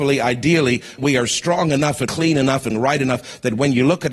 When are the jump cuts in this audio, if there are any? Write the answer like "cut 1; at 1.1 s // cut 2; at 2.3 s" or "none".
cut 1; at 1.0 s // cut 2; at 2.1 s // cut 3; at 2.7 s